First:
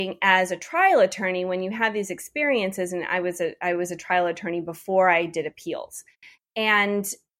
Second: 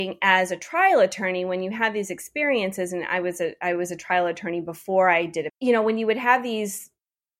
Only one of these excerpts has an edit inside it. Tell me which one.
second; 1 cut; at 5.5 s

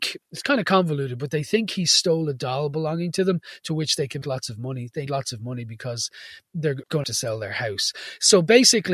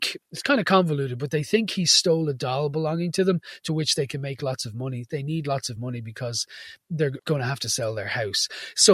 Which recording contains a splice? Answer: first; 3 cuts; at 4.2 s, 5.1 s, 7.0 s

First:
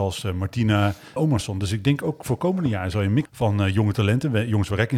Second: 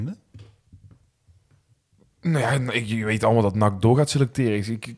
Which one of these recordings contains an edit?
first; 2 cuts; at 1.2 s, 3.3 s

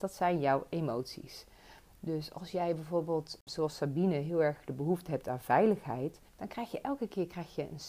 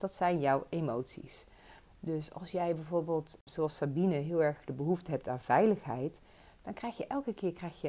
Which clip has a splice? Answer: first; 1 cut; at 6.3 s

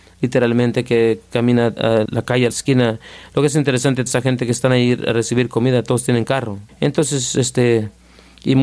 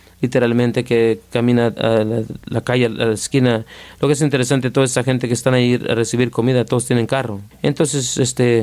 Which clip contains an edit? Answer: first; 3 cuts; at 2.1 s, 2.5 s, 4.1 s

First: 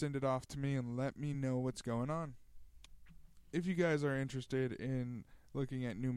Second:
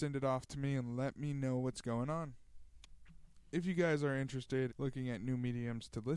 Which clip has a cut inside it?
second; 1 cut; at 4.7 s

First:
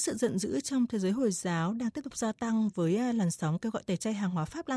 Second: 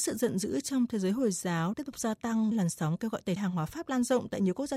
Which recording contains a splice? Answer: second; 3 cuts; at 1.7 s, 2.5 s, 3.4 s

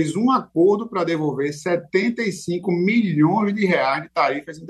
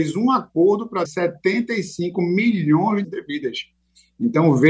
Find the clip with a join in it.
second; 2 cuts; at 1.0 s, 3.0 s

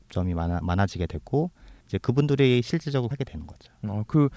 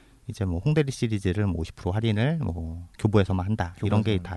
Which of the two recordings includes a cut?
first; 2 cuts; at 1.8 s, 3.1 s

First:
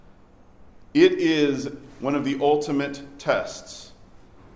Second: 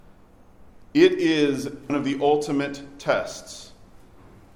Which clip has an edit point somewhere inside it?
second; 1 cut; at 1.9 s

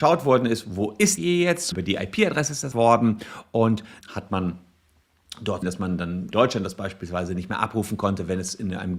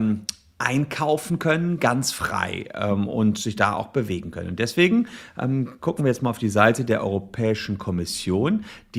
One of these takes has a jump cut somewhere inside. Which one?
first; 6 cuts; at 1.2 s, 1.7 s, 2.7 s, 4.0 s, 5.6 s, 6.3 s

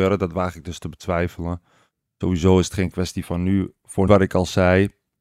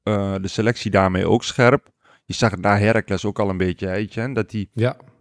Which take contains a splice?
first; 1 cut; at 4.1 s

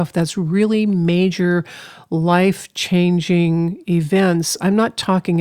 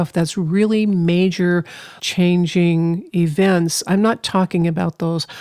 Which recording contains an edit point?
second; 1 cut; at 2.0 s

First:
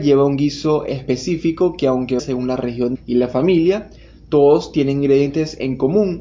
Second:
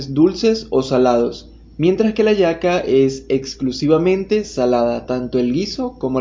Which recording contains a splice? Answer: first; 2 cuts; at 2.2 s, 2.9 s

